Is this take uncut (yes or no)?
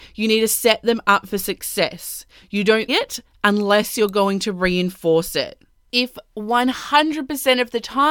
no